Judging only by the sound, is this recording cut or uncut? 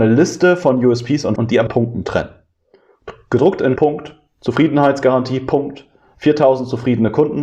cut